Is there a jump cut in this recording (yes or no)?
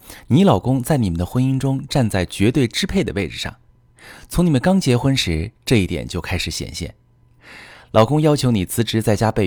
no